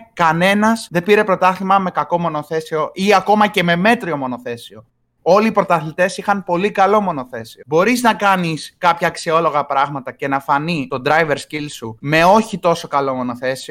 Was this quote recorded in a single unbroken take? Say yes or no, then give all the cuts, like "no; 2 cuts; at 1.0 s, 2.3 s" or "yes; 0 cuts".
yes; 0 cuts